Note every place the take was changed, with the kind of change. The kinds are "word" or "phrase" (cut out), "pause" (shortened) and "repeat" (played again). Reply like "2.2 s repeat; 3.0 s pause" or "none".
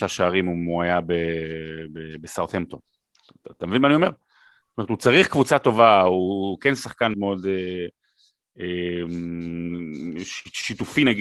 7.1 s word